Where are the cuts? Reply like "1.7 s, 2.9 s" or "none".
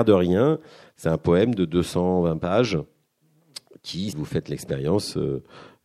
4.1 s